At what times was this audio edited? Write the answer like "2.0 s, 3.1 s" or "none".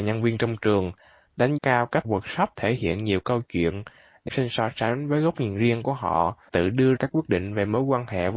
1.6 s, 2.0 s, 4.3 s, 6.5 s, 7.0 s